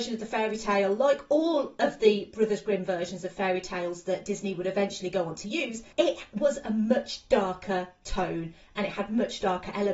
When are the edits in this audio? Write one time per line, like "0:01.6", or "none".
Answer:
0:05.9